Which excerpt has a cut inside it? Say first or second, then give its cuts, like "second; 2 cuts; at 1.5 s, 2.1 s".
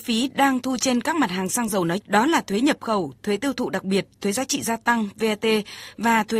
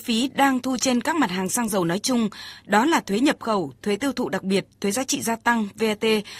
first; 1 cut; at 2.0 s